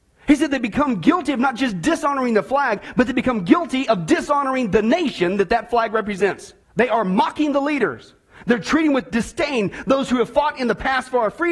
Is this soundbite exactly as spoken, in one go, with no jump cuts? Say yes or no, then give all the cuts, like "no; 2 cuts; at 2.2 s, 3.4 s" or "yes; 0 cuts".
no; 1 cut; at 6.6 s